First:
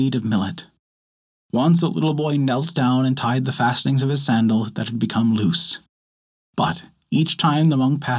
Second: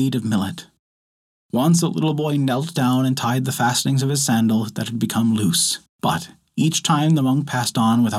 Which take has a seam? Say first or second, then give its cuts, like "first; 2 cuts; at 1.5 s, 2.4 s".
second; 1 cut; at 5.9 s